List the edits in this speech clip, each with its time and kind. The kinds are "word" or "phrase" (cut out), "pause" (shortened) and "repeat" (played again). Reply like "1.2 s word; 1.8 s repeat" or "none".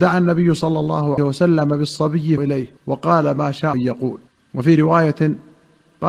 1.2 s word; 2.4 s word; 2.8 s pause; 3.7 s word; 4.3 s pause